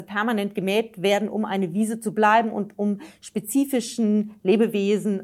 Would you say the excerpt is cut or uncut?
uncut